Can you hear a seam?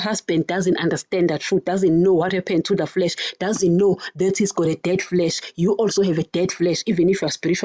no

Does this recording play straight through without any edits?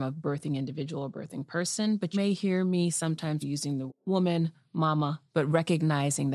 no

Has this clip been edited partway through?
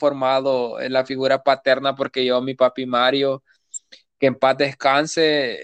no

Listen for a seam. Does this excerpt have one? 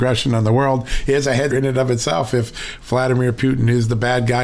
yes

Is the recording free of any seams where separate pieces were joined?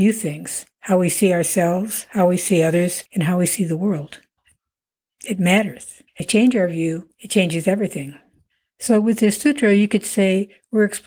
no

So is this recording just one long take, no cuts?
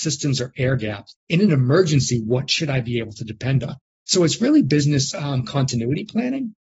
yes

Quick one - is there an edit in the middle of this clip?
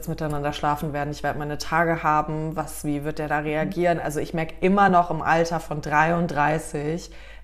no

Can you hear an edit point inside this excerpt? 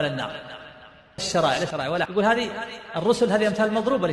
yes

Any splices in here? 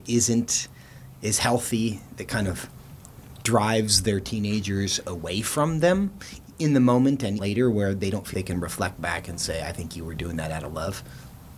yes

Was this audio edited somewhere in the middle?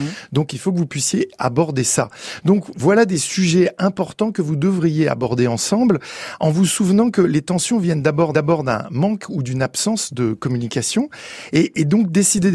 yes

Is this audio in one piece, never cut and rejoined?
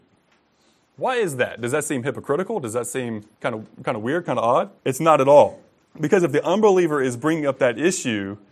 no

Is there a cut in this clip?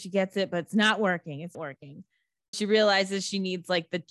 yes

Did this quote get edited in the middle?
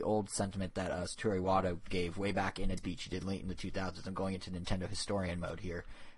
yes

